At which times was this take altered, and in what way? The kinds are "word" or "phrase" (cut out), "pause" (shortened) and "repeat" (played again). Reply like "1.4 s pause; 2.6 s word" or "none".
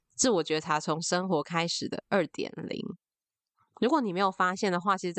none